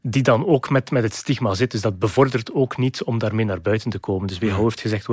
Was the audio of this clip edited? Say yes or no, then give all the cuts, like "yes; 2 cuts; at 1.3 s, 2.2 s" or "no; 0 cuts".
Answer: no; 0 cuts